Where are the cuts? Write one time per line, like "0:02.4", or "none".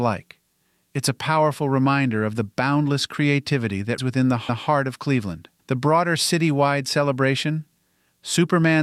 0:04.0
0:04.5
0:05.6